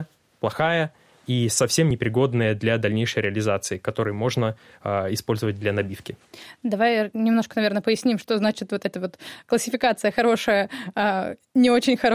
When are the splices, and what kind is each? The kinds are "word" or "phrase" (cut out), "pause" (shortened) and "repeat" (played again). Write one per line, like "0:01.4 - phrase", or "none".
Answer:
none